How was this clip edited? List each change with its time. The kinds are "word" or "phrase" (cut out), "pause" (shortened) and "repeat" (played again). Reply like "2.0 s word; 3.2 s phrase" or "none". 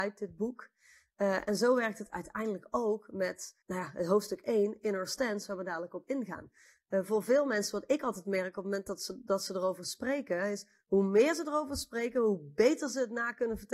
3.6 s pause